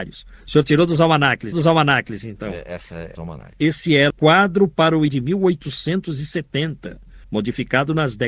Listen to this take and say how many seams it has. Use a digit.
5